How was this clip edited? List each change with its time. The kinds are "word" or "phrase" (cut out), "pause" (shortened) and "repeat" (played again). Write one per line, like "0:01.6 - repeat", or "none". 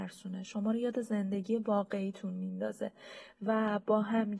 none